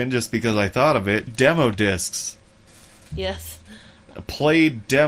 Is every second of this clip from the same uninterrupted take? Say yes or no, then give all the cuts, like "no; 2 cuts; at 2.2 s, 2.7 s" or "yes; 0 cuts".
no; 1 cut; at 1.3 s